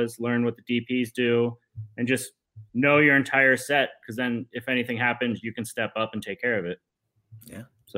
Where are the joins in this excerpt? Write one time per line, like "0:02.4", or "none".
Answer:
0:02.7